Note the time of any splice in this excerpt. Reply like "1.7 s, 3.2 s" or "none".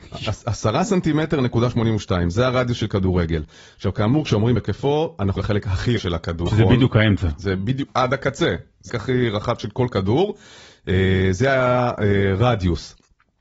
4.6 s, 5.4 s, 6.0 s, 6.5 s, 7.9 s, 8.9 s